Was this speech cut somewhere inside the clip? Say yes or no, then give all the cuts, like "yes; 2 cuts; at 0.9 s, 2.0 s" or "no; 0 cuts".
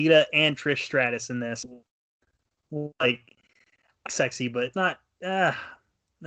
yes; 2 cuts; at 4.1 s, 4.7 s